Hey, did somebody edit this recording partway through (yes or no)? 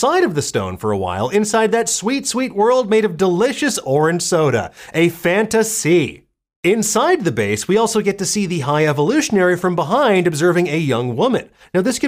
no